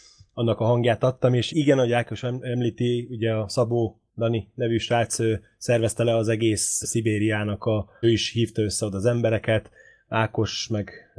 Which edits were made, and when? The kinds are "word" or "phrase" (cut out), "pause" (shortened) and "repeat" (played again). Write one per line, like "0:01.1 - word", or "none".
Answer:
0:01.5 - word
0:04.1 - pause
0:06.8 - word
0:08.0 - phrase